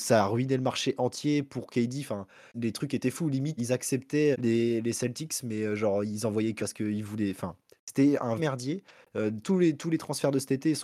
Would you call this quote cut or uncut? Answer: cut